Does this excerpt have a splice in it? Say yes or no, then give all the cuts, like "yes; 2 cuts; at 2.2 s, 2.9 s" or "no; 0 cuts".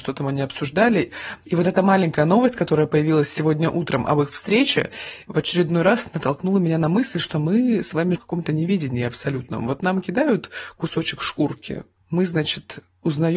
yes; 1 cut; at 8.2 s